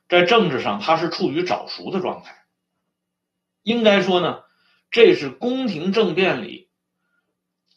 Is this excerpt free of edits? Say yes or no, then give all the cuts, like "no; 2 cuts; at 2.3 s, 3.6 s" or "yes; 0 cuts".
yes; 0 cuts